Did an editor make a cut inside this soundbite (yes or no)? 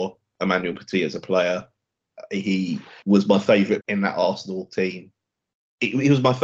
yes